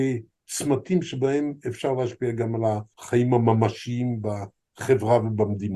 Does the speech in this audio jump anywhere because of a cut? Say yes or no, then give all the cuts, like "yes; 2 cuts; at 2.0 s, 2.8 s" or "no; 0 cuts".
yes; 1 cut; at 2.9 s